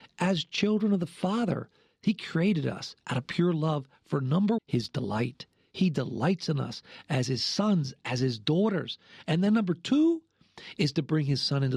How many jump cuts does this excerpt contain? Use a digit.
1